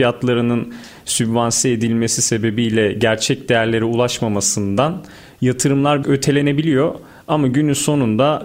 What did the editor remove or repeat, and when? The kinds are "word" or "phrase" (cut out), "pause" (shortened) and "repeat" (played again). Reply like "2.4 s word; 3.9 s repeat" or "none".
6.0 s word